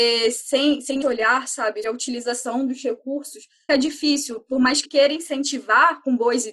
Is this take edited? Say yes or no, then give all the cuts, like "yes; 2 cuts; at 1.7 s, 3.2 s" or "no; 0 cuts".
yes; 4 cuts; at 1.0 s, 1.8 s, 3.7 s, 4.8 s